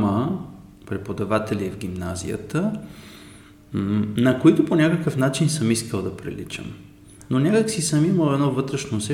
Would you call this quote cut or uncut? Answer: uncut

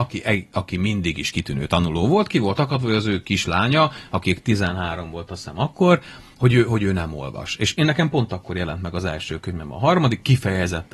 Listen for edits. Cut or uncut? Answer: uncut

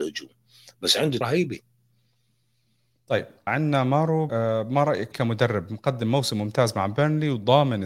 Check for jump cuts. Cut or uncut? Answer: cut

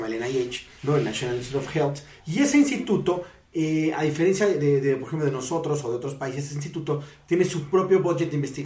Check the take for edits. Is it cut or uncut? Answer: uncut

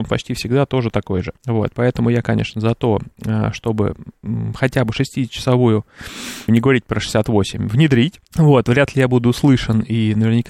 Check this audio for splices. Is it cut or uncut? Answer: cut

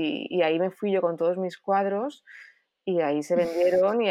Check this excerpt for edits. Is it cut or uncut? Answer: uncut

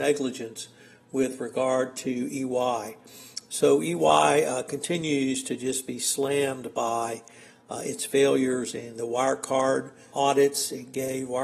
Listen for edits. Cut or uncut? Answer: cut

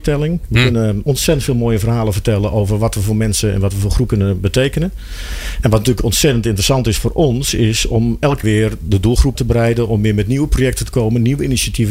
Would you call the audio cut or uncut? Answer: cut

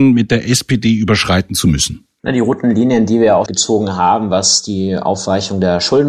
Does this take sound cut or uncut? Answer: cut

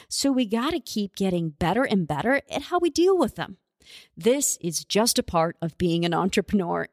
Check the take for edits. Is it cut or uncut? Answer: uncut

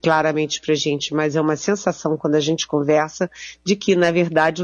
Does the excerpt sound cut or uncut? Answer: uncut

